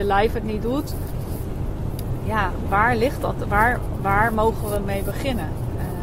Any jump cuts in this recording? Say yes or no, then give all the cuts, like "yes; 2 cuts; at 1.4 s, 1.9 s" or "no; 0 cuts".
no; 0 cuts